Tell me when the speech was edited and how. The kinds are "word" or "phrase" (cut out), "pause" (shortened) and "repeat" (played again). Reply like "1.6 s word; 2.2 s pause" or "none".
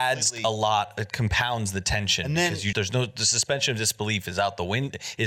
2.7 s word